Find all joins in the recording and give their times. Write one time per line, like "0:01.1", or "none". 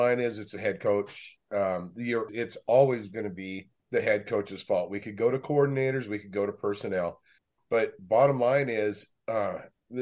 0:02.3
0:03.8
0:07.4

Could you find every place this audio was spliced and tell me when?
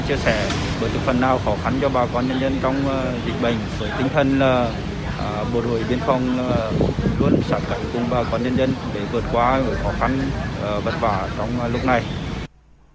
none

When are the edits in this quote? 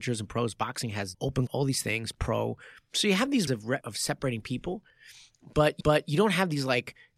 0:01.1
0:01.5
0:03.5
0:03.8
0:05.8

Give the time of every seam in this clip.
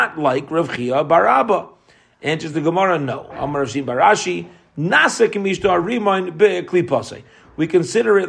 none

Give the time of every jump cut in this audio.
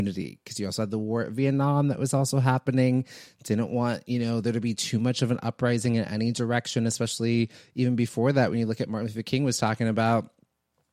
none

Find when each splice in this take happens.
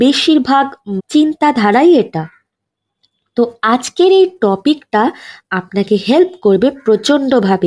0:01.0

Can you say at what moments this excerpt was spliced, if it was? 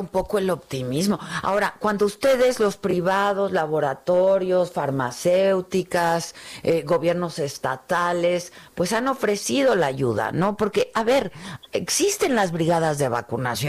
none

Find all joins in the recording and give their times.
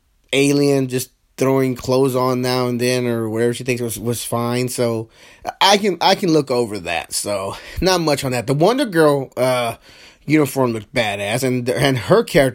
none

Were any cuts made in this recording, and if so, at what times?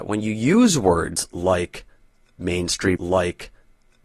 0:03.0

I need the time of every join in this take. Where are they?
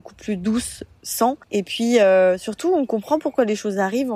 0:01.4

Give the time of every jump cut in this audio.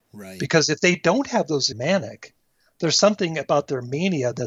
0:01.7

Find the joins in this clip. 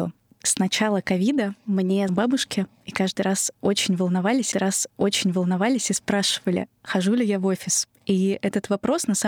0:02.1
0:04.5

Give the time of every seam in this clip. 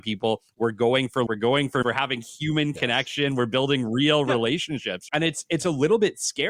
0:01.3
0:01.8
0:05.1

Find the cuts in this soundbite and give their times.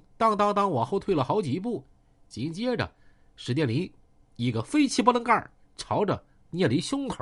none

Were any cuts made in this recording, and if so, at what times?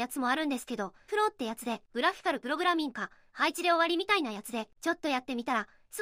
0:01.1

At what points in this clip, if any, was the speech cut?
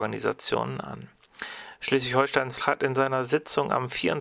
0:02.6

